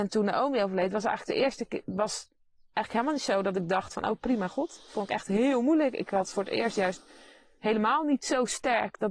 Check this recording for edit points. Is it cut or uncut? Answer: uncut